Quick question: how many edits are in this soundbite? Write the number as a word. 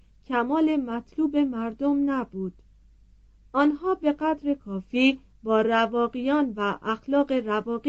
zero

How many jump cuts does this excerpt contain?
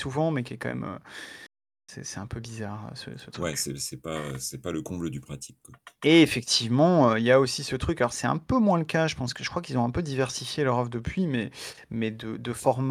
zero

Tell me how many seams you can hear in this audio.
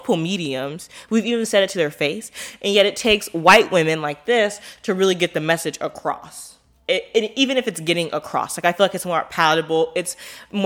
zero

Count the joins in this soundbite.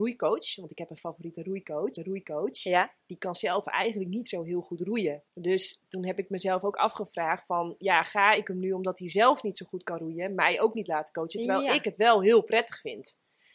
two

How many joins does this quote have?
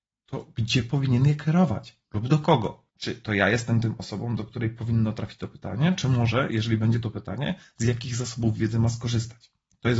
two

